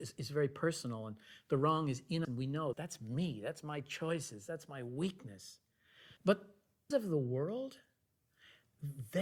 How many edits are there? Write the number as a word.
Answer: four